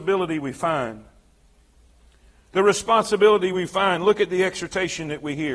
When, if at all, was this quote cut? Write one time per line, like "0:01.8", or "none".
none